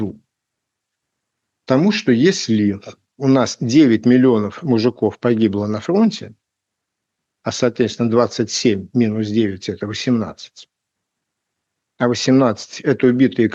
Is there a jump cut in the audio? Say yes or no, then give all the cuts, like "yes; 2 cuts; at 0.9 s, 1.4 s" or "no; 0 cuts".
no; 0 cuts